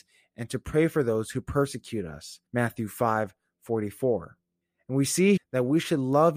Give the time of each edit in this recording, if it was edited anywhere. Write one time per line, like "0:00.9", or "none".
0:02.5
0:04.6
0:05.4